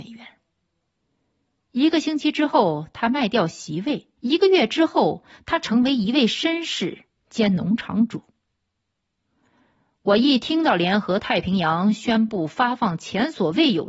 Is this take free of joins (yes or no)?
no